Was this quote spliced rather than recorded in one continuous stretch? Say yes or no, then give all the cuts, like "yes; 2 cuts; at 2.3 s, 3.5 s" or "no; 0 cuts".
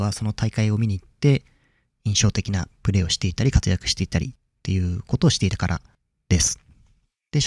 no; 0 cuts